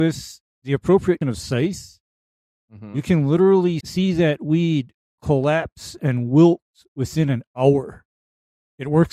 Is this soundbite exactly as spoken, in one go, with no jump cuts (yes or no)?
no